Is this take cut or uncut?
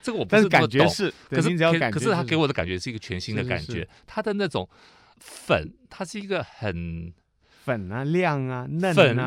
uncut